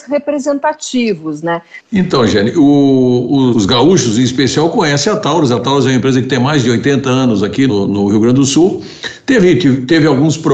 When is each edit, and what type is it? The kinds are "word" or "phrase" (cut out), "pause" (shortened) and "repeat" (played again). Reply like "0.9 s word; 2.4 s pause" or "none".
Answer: 3.5 s word; 7.7 s word